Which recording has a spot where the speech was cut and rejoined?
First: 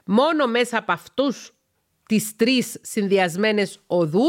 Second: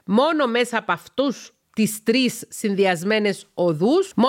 second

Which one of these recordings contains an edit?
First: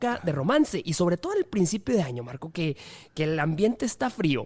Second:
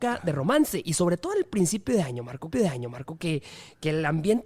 second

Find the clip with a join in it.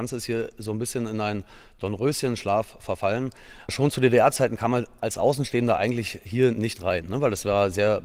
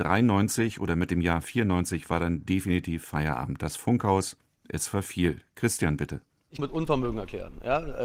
second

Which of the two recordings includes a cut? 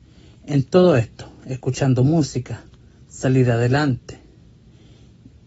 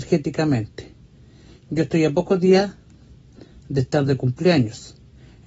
first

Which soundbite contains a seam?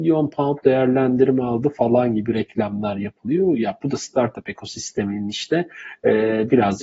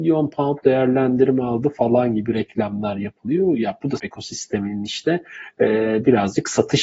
second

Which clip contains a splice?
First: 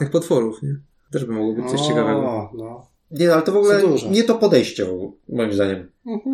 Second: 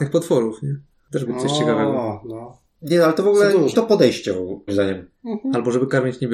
second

